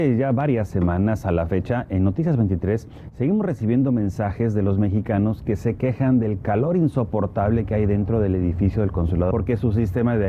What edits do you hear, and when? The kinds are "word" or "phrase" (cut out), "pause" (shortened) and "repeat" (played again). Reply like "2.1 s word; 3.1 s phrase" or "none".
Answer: 9.3 s phrase

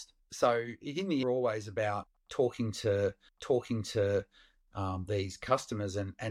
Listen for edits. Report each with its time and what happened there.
1.2 s phrase; 3.3 s repeat

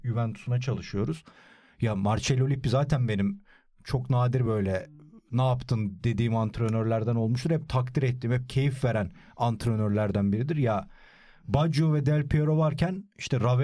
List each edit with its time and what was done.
none

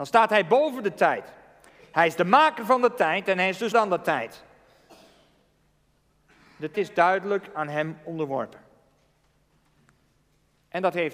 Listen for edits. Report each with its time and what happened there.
3.7 s word; 6.7 s word

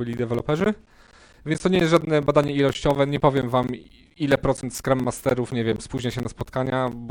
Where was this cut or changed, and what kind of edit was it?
none

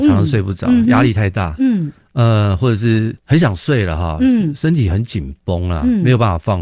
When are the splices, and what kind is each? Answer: 3.2 s pause

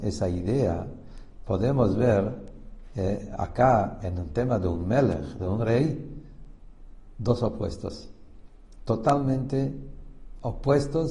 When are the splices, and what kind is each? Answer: none

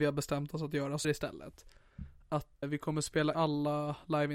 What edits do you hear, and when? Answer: 1.0 s word; 2.6 s word; 3.3 s word

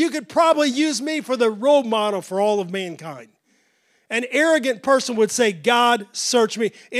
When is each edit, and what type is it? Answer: none

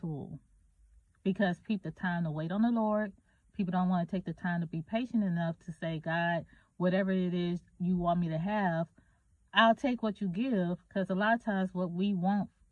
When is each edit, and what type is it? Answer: 1.8 s phrase

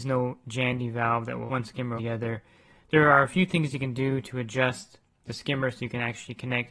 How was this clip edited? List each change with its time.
1.5 s word; 2.0 s word

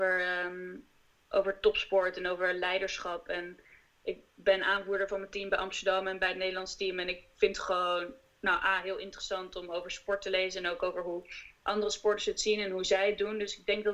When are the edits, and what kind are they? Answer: none

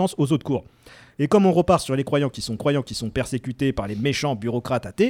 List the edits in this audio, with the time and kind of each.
2.6 s repeat

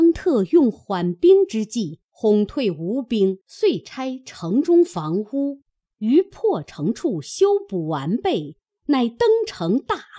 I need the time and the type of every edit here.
3.4 s pause

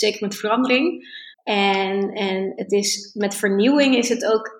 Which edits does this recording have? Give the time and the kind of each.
1.3 s pause

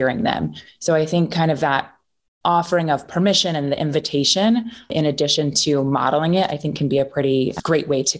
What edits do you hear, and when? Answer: none

